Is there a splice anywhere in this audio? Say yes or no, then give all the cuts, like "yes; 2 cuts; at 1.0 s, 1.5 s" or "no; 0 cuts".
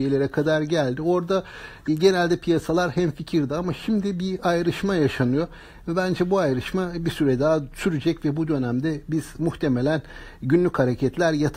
no; 0 cuts